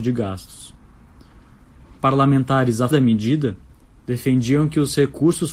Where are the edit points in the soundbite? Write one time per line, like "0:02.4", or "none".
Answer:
0:02.9